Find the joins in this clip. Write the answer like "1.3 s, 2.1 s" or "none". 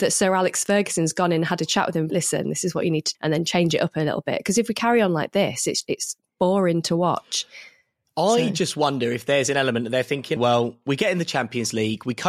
2.1 s, 3.1 s, 5.8 s, 10.4 s